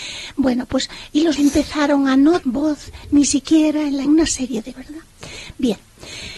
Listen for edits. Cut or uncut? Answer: cut